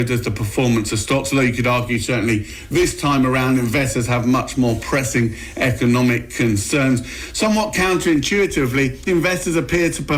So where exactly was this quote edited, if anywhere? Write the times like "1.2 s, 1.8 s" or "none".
9.1 s